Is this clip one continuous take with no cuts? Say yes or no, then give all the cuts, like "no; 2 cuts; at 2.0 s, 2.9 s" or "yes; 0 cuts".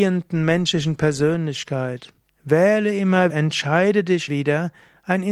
no; 3 cuts; at 2.2 s, 3.3 s, 4.3 s